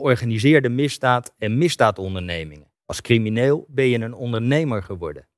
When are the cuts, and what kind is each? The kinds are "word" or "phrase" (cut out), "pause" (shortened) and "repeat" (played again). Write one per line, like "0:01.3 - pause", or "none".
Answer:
0:02.8 - pause